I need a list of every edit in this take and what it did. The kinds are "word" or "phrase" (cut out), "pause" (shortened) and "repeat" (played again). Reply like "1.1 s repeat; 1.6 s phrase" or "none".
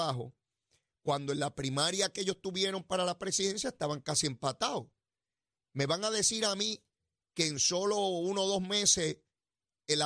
none

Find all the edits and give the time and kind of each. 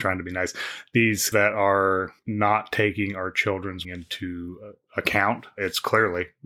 1.3 s word; 3.8 s word

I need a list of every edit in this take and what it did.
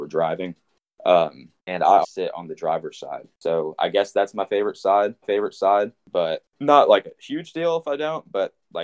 1.6 s pause; 2.0 s word; 5.2 s repeat

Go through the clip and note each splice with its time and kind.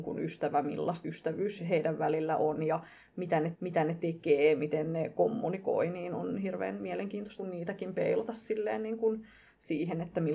1.0 s word; 3.5 s repeat; 7.4 s word

